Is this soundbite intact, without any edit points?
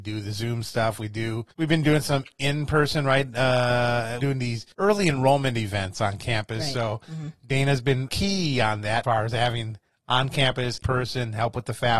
no; 6 cuts; at 1.5 s, 4.2 s, 4.7 s, 8.1 s, 9.0 s, 10.8 s

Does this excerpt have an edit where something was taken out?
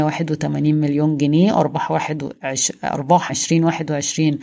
yes; 1 cut; at 3.3 s

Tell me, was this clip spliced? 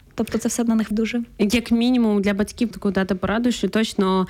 yes; 2 cuts; at 0.9 s, 2.7 s

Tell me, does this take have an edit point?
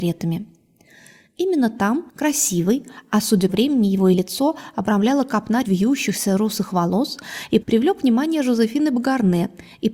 yes; 5 cuts; at 2.1 s, 3.5 s, 4.1 s, 5.6 s, 7.6 s

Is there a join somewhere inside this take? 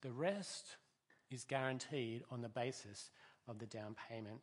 no; 0 cuts

